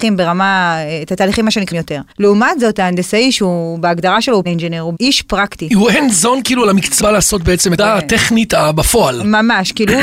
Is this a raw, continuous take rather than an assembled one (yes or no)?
no